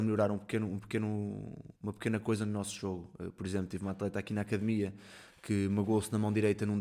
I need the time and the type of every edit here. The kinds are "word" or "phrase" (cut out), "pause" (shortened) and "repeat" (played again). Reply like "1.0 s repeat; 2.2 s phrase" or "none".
1.8 s pause